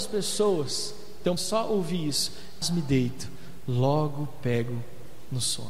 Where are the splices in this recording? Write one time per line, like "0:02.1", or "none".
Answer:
0:01.4
0:02.6